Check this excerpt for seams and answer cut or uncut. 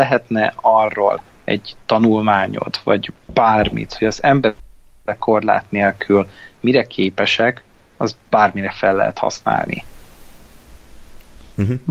uncut